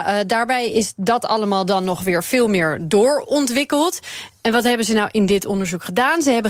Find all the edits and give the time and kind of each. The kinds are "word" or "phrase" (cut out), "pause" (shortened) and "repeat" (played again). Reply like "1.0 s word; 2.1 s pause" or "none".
none